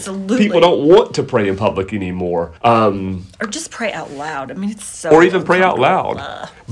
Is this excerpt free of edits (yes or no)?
no